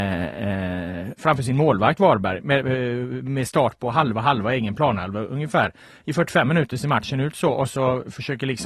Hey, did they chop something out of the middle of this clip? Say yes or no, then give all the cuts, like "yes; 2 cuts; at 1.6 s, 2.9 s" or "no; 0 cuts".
no; 0 cuts